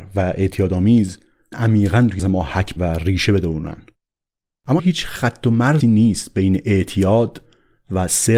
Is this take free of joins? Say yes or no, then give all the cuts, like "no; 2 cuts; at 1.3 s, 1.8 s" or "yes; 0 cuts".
no; 5 cuts; at 1.5 s, 2.2 s, 2.8 s, 4.8 s, 5.8 s